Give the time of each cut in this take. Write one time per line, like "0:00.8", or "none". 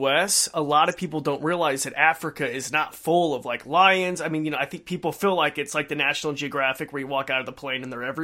none